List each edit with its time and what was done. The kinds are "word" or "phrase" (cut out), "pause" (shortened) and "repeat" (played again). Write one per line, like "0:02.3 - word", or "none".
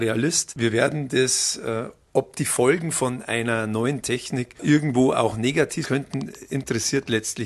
0:02.1 - word
0:05.8 - word